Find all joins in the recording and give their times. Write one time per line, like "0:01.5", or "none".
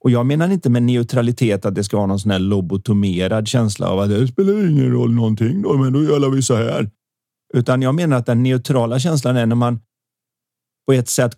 none